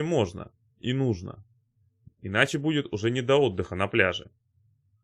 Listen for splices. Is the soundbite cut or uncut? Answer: uncut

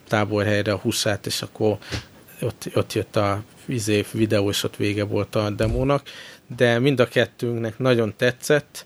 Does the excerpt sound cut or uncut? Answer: uncut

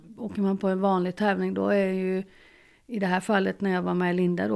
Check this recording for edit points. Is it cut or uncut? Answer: uncut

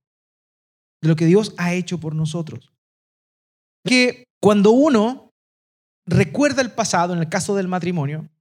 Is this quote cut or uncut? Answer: cut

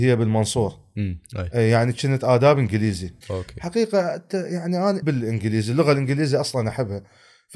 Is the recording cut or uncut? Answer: cut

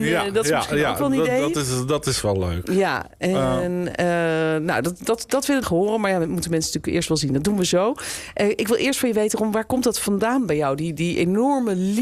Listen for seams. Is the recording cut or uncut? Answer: cut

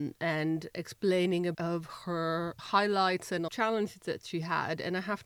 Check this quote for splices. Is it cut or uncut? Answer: cut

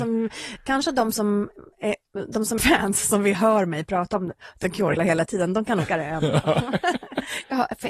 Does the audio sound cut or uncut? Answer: cut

